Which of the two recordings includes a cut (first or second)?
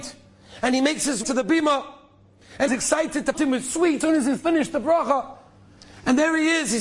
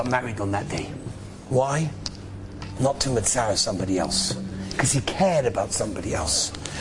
first